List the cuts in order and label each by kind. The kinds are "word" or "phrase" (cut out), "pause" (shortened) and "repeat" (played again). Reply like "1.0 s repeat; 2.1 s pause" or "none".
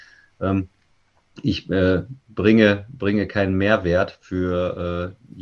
none